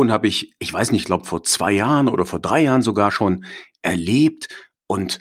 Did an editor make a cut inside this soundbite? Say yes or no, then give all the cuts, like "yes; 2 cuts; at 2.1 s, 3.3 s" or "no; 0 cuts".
no; 0 cuts